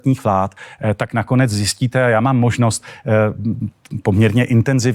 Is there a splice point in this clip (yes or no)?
no